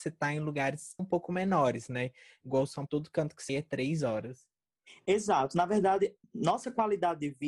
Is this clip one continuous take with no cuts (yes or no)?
no